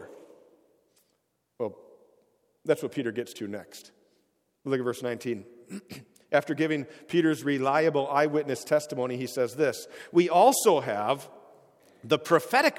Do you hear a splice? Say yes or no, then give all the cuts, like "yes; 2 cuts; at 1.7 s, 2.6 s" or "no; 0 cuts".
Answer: no; 0 cuts